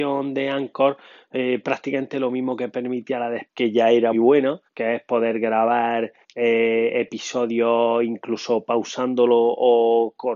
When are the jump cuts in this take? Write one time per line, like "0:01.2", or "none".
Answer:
0:03.4
0:04.1
0:04.7
0:06.2